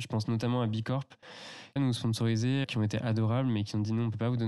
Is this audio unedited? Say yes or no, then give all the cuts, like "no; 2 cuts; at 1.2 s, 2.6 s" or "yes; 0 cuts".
no; 2 cuts; at 1.8 s, 2.6 s